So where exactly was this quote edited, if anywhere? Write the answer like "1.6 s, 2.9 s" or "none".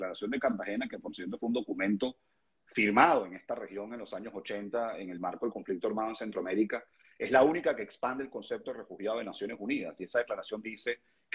none